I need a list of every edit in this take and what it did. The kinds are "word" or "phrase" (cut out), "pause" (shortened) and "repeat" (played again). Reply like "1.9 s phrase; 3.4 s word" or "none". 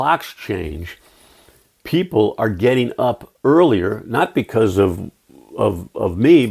none